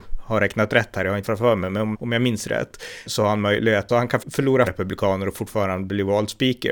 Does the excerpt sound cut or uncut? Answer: cut